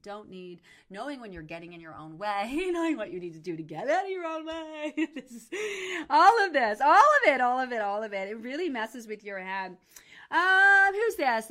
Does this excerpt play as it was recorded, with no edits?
yes; 0 cuts

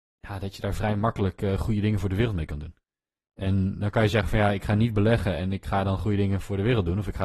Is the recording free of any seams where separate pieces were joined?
yes; 0 cuts

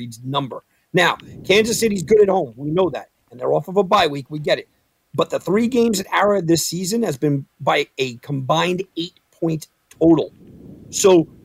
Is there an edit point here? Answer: no; 0 cuts

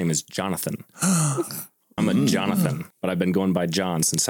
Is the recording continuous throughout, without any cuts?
no; 2 cuts; at 2.0 s, 2.9 s

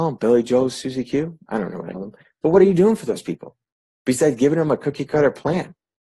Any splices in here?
yes; 1 cut; at 1.9 s

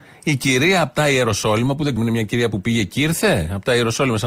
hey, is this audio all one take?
no; 1 cut; at 2.0 s

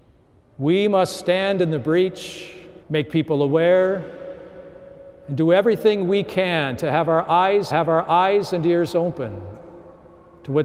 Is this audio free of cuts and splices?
no; 2 cuts; at 2.8 s, 7.7 s

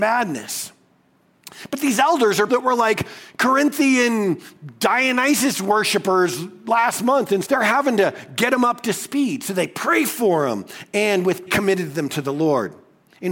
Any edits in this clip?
yes; 3 cuts; at 2.5 s, 7.4 s, 11.5 s

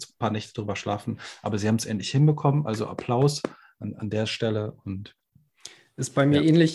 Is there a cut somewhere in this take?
no; 0 cuts

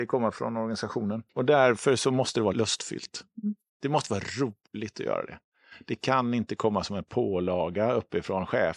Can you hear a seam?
yes; 1 cut; at 1.3 s

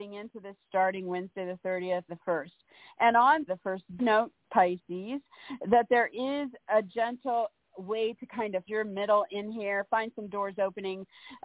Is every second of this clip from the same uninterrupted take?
no; 5 cuts; at 2.1 s, 3.5 s, 4.0 s, 7.7 s, 8.7 s

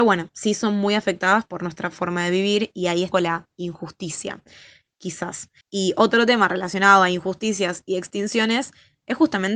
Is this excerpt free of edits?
no; 2 cuts; at 3.1 s, 5.6 s

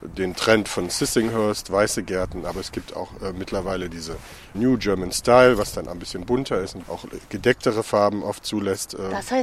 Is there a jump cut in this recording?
no; 0 cuts

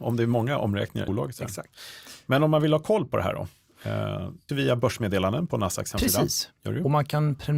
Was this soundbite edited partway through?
yes; 2 cuts; at 1.1 s, 4.5 s

